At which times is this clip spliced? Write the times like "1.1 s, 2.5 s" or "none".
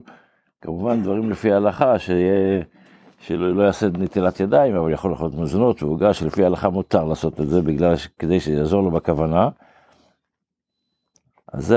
none